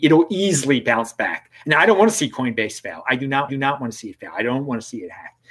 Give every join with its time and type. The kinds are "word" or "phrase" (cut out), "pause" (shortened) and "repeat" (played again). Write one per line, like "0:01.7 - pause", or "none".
0:03.5 - repeat